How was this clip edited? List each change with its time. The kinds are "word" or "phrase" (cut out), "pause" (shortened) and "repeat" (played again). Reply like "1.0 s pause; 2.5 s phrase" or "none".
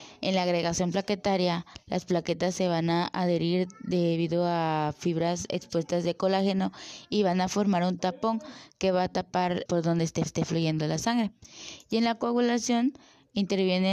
8.0 s word; 9.7 s word; 10.3 s repeat